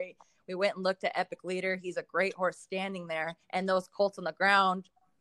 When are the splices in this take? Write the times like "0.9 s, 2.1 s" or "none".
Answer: 3.4 s